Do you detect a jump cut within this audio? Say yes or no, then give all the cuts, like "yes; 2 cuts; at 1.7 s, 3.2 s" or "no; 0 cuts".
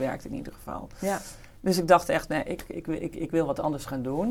no; 0 cuts